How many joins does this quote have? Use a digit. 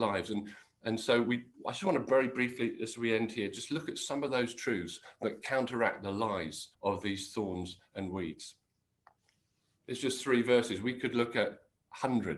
3